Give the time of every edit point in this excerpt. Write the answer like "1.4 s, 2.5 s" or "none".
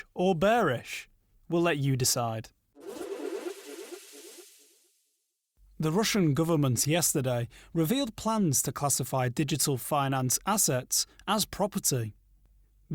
none